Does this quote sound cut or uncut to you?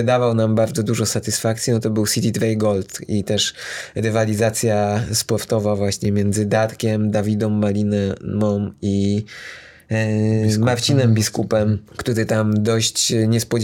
cut